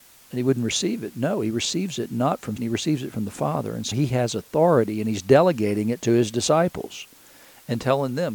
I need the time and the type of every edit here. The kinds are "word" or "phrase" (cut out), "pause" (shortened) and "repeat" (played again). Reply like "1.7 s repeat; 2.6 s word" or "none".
2.6 s word; 3.9 s word